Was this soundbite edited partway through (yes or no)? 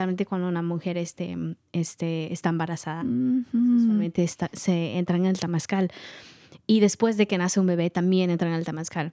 no